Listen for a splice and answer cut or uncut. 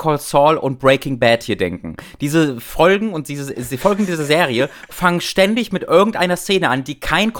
uncut